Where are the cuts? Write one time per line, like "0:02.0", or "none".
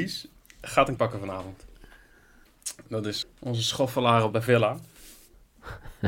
0:01.0
0:03.2
0:04.3